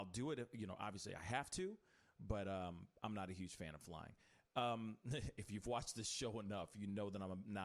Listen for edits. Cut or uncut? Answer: uncut